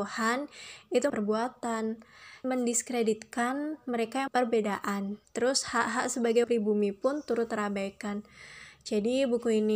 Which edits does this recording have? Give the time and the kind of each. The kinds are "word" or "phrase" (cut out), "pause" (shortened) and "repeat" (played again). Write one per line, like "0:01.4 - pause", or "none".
0:01.1 - phrase
0:02.4 - word
0:04.3 - phrase
0:05.2 - pause
0:06.4 - word